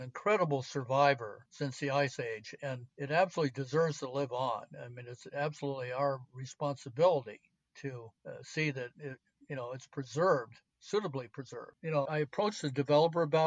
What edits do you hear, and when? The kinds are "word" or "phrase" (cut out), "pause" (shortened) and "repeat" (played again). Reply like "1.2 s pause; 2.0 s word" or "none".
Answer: 12.0 s word

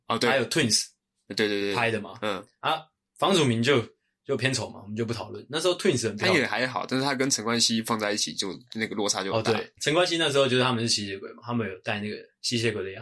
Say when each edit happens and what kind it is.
none

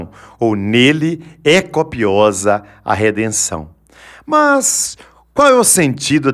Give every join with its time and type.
none

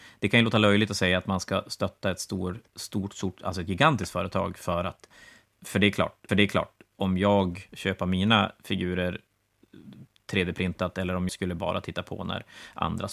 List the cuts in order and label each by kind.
2.7 s pause; 6.3 s repeat; 7.7 s word; 11.3 s word

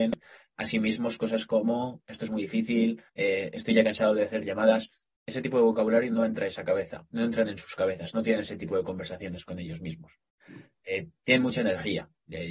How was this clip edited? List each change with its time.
3.1 s pause

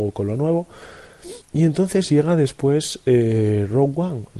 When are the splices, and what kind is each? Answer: 1.4 s pause

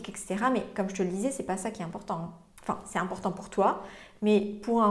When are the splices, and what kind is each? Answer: none

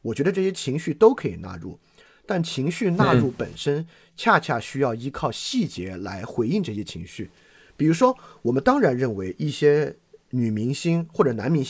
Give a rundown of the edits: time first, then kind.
none

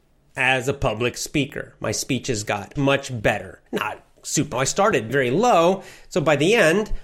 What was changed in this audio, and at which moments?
2.8 s word; 3.7 s pause; 4.5 s phrase; 5.1 s word

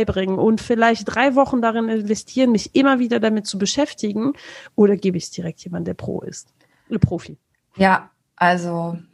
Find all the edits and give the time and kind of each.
none

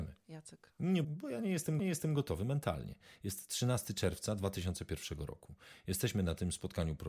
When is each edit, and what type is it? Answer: 1.0 s word; 1.8 s repeat

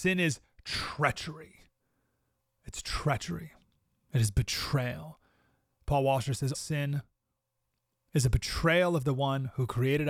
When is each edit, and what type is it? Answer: 6.5 s word

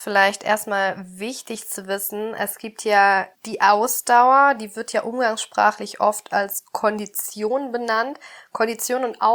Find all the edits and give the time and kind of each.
3.3 s pause

